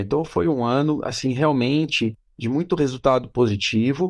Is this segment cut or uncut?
uncut